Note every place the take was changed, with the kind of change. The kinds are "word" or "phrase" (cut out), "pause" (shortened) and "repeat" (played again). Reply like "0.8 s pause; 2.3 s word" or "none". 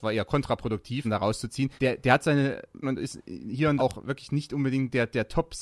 1.0 s word; 1.8 s pause; 2.8 s word; 3.8 s word